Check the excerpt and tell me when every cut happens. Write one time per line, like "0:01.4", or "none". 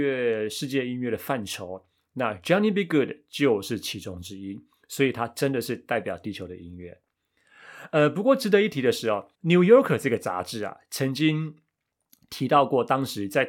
0:09.3